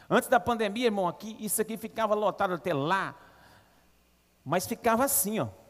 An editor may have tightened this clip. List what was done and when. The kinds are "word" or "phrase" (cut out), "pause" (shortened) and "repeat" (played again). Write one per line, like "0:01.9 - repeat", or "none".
none